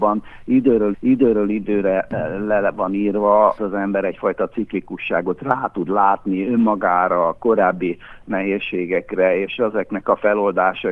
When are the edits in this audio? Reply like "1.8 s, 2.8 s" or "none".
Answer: 0.9 s, 3.6 s